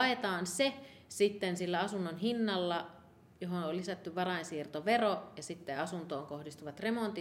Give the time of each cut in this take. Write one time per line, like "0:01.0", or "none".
none